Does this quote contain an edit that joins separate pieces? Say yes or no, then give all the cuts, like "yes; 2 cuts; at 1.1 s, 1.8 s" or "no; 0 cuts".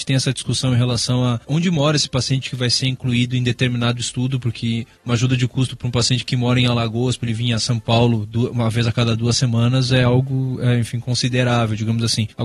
yes; 1 cut; at 5.0 s